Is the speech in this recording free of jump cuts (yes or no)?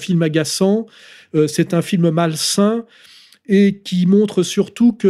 yes